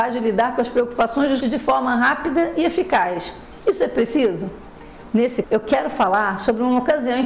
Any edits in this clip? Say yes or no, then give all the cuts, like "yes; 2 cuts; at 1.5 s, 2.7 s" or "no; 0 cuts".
yes; 2 cuts; at 1.4 s, 5.4 s